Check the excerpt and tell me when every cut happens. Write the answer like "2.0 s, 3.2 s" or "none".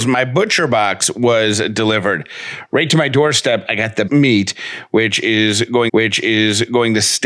4.1 s, 5.9 s